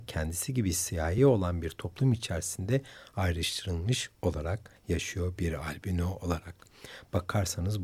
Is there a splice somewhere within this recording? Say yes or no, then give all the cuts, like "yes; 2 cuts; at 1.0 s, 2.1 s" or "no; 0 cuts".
no; 0 cuts